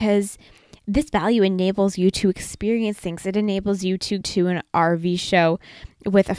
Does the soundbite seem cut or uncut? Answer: cut